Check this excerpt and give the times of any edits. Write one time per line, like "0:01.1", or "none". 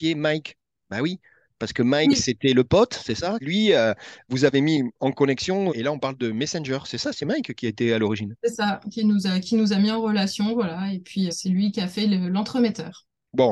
0:03.4
0:05.7
0:11.3